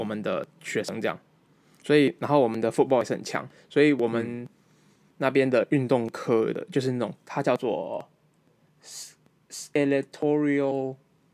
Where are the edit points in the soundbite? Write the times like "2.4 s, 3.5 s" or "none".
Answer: 1.4 s